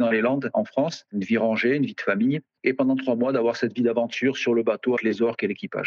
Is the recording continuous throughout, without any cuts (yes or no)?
no